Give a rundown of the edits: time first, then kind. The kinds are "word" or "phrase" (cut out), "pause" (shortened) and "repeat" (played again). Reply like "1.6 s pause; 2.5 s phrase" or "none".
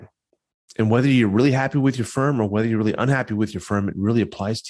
none